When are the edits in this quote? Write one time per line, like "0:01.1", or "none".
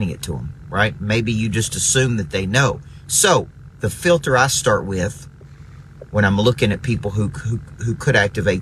none

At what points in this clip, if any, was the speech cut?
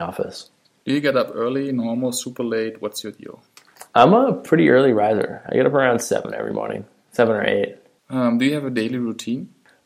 none

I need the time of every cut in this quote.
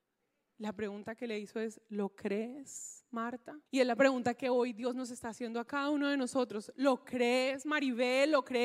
0:03.7

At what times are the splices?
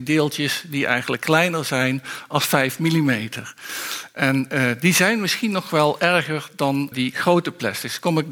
0:06.9

